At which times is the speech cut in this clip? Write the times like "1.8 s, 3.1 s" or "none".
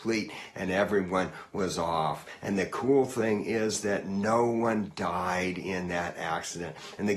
none